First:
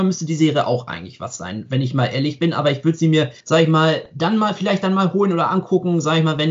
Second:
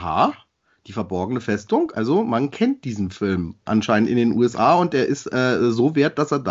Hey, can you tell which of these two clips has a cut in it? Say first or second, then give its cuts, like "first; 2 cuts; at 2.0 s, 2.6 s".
first; 1 cut; at 3.4 s